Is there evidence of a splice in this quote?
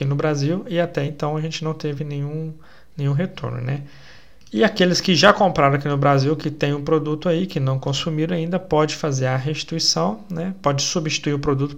no; 0 cuts

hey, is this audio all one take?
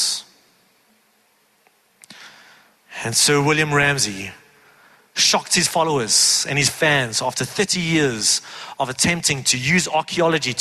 yes; 0 cuts

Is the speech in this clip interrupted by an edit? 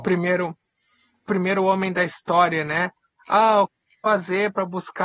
no; 0 cuts

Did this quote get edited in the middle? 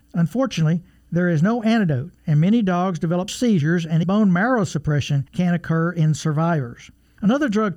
yes; 2 cuts; at 3.3 s, 4.0 s

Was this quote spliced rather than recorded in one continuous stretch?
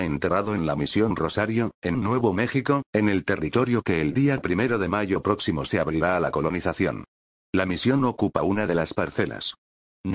no; 0 cuts

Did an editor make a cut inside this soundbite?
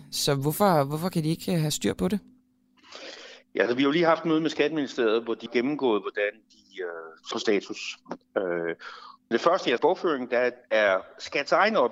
yes; 5 cuts; at 5.5 s, 7.3 s, 9.3 s, 9.8 s, 10.6 s

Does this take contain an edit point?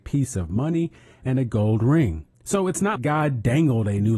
yes; 2 cuts; at 2.3 s, 3.0 s

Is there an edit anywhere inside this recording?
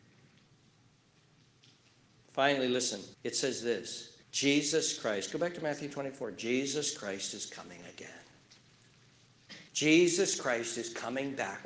yes; 3 cuts; at 3.1 s, 4.2 s, 9.7 s

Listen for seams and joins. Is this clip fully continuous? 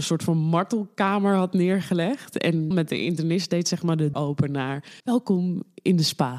no; 3 cuts; at 2.7 s, 4.1 s, 5.0 s

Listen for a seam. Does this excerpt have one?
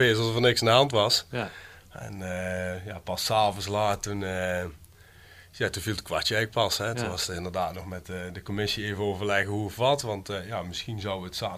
no; 0 cuts

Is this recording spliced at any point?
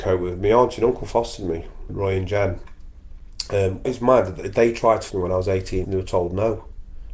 yes; 4 cuts; at 1.9 s, 3.8 s, 5.1 s, 5.8 s

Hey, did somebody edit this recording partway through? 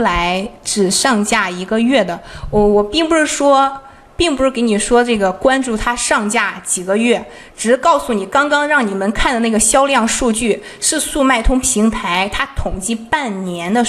no; 0 cuts

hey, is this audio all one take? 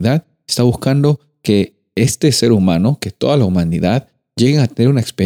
yes; 0 cuts

